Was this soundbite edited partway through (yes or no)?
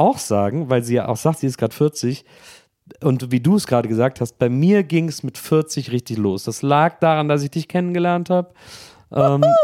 no